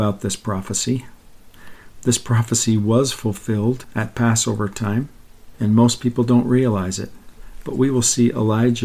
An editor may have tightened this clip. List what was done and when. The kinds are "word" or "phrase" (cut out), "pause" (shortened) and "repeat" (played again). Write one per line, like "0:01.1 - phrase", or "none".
0:05.5 - pause

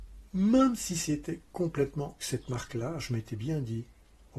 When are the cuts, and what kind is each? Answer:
0:02.2 - phrase

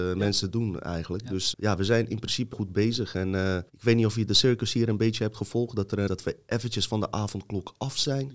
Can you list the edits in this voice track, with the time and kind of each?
0:01.5 - word
0:02.5 - word
0:03.7 - pause
0:06.1 - phrase

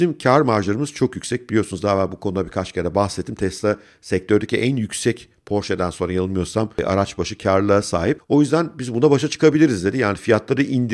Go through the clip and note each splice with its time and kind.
none

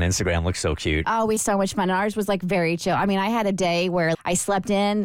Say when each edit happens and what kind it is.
0:01.4 - word
0:04.1 - word

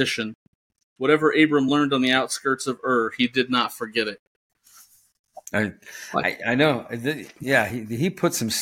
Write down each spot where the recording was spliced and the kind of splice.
none

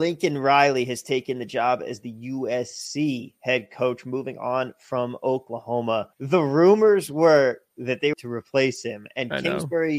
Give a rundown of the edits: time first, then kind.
0:06.1 - pause
0:08.1 - phrase

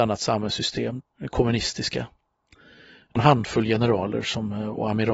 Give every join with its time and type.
0:01.0 - word
0:03.2 - word

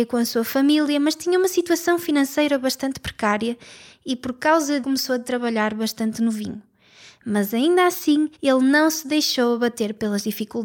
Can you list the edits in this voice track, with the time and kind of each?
0:04.8 - phrase
0:08.3 - pause

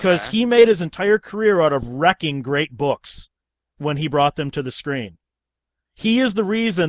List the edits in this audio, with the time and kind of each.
none

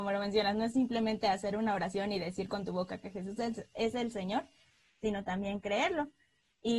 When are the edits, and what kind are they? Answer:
none

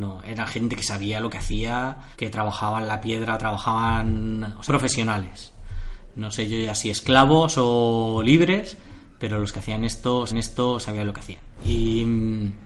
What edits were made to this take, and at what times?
0:02.1 - pause
0:04.7 - phrase
0:10.3 - repeat

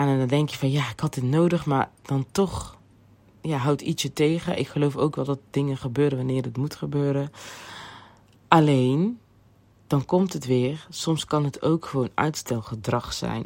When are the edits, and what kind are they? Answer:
0:03.0 - pause

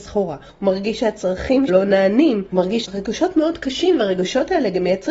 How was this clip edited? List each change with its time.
0:01.7 - word
0:02.5 - word
0:02.8 - word

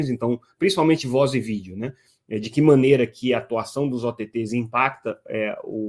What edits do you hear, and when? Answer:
none

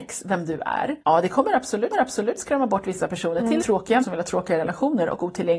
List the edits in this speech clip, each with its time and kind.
0:01.0 - pause
0:01.9 - repeat
0:03.6 - word
0:04.0 - word

